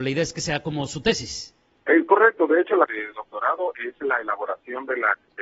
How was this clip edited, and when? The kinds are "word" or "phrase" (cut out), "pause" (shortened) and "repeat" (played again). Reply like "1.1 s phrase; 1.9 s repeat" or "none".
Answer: 2.9 s phrase